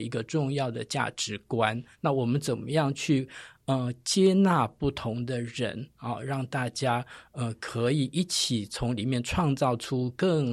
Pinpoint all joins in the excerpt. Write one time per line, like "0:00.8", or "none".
0:01.9